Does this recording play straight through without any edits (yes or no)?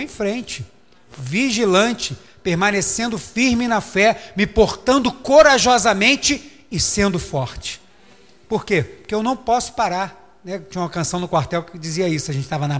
yes